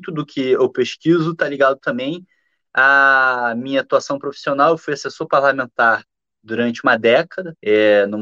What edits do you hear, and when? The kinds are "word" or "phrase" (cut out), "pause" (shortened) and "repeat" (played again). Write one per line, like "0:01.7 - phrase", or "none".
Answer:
none